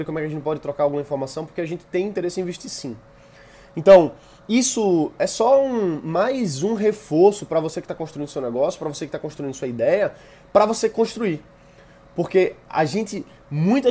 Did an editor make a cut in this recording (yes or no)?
no